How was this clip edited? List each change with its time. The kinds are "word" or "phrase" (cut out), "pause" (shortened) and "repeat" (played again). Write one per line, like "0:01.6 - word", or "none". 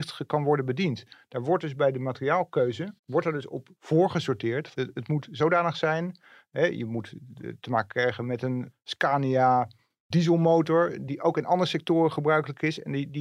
0:03.0 - pause
0:04.7 - word

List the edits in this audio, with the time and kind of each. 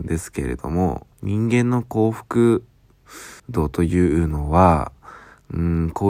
0:01.1 - pause
0:03.4 - pause

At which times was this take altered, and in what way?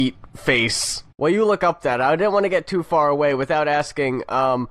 0:01.1 - pause

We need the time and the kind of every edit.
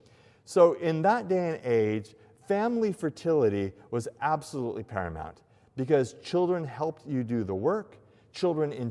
none

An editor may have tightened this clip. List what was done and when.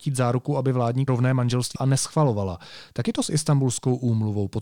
0:01.1 - phrase
0:01.8 - word
0:03.0 - word

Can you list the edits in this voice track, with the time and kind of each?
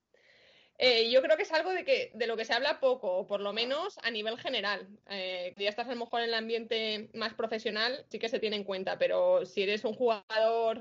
0:05.5 - word
0:08.1 - word

